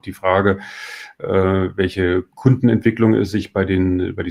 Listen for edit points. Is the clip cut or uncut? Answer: cut